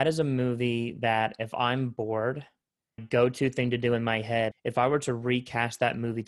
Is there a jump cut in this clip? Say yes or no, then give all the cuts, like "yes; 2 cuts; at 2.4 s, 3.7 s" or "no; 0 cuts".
yes; 2 cuts; at 3.0 s, 4.5 s